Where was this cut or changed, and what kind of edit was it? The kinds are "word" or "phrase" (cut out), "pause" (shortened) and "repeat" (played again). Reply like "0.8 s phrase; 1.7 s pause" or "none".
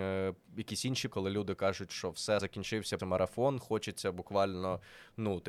1.1 s word; 2.4 s word; 3.0 s word